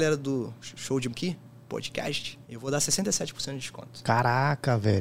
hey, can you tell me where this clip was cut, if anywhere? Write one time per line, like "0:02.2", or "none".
0:01.1
0:02.4

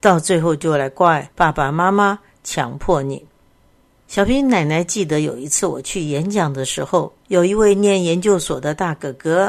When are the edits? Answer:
0:07.2

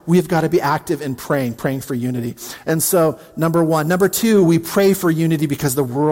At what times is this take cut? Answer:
none

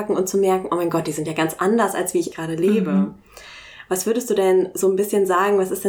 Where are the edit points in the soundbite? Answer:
0:02.3

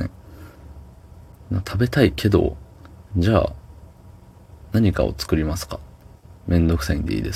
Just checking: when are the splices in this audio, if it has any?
0:03.1

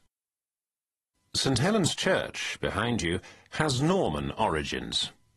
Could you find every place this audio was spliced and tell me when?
none

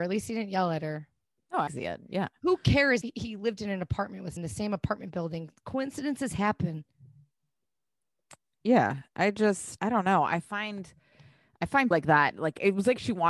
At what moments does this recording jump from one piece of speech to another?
0:01.7
0:03.0
0:04.4
0:09.8
0:11.9

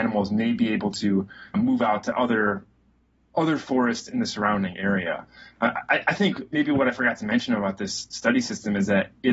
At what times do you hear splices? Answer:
0:01.5

